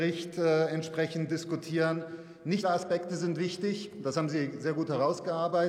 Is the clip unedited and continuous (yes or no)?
no